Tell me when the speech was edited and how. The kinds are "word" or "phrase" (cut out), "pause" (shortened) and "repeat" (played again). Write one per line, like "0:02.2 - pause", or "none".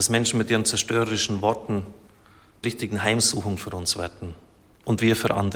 0:02.6 - word